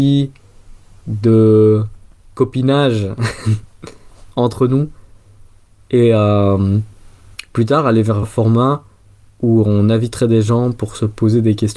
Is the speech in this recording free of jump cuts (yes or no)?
no